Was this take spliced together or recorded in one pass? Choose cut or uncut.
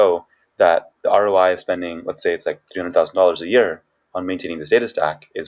uncut